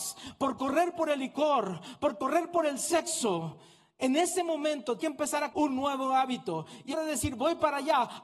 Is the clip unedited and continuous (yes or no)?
no